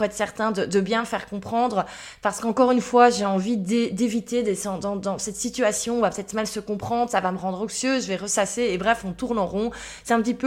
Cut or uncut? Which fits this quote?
uncut